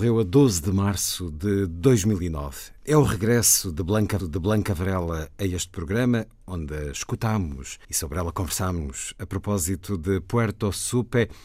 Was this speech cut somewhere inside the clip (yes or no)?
yes